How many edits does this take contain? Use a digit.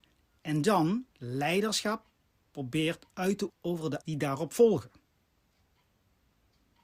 3